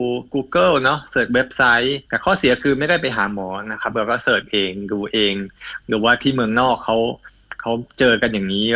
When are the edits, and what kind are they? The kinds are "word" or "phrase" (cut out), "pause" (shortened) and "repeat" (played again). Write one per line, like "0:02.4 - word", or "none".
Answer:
0:02.1 - pause